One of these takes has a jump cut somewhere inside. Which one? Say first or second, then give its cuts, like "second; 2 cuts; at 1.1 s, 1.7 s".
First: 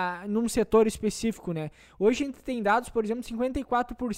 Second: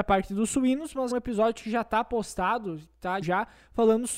second; 2 cuts; at 1.1 s, 3.2 s